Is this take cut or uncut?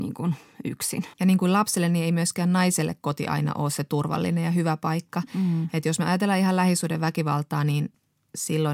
cut